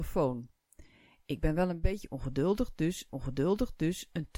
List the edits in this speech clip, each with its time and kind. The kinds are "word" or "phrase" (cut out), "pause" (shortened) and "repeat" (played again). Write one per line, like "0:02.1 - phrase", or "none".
0:03.1 - repeat